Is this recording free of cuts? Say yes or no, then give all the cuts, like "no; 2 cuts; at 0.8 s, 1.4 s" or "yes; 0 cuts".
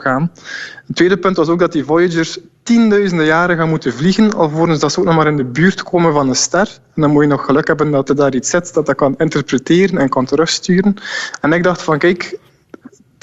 yes; 0 cuts